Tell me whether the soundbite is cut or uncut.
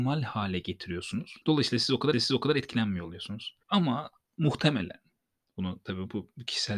cut